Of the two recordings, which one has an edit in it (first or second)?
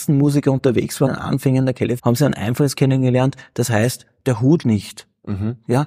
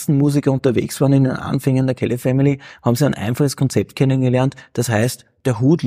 first